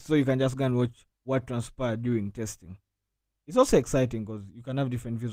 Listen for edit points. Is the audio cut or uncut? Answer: uncut